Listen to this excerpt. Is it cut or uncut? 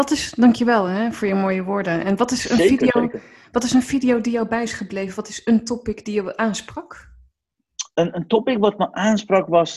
uncut